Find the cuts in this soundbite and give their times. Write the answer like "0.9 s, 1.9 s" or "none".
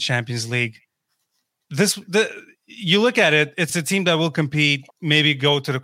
3.7 s, 4.9 s